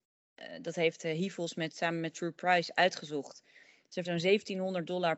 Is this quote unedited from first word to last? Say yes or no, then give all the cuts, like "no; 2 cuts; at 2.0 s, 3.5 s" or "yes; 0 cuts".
no; 1 cut; at 4.0 s